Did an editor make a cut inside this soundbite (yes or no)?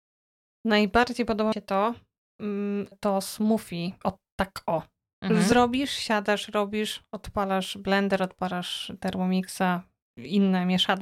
yes